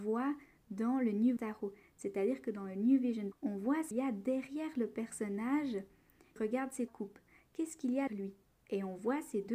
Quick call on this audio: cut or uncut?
cut